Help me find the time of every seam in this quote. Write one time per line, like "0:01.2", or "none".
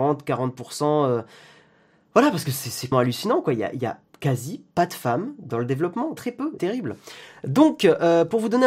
0:02.9
0:06.2
0:06.6